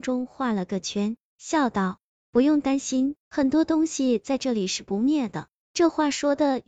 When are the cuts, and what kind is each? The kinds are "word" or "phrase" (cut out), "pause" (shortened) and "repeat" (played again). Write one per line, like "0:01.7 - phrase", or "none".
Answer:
0:03.2 - pause